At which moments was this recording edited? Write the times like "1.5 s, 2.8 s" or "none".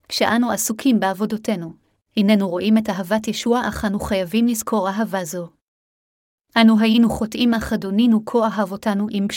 none